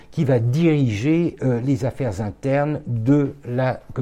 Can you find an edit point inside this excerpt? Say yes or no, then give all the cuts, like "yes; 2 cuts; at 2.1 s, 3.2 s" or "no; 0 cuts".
no; 0 cuts